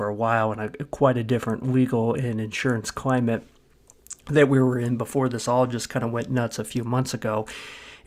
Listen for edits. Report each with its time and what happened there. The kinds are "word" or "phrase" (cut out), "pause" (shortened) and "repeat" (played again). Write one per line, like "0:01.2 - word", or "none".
none